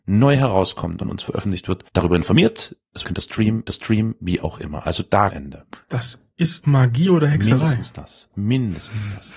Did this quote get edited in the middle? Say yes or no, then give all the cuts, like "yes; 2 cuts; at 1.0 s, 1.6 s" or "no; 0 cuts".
yes; 7 cuts; at 1.0 s, 1.9 s, 3.0 s, 3.7 s, 5.3 s, 5.8 s, 6.6 s